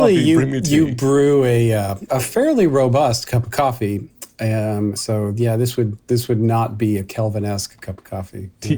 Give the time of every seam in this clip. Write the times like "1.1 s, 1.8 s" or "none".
2.1 s, 5.0 s